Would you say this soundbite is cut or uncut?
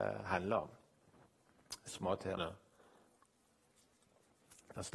cut